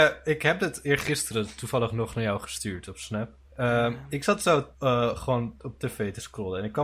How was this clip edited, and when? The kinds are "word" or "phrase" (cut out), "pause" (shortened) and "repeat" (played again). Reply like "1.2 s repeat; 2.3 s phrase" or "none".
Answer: 3.5 s pause; 4.7 s pause